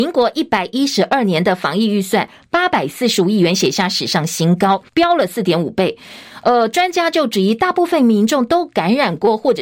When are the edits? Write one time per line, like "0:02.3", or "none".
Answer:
0:04.9